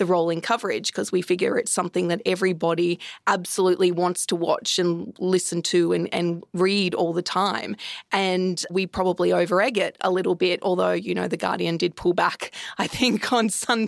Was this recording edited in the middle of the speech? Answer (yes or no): yes